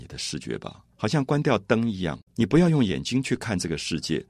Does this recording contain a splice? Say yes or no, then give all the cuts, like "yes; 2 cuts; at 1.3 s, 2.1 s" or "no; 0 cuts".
yes; 2 cuts; at 0.9 s, 2.3 s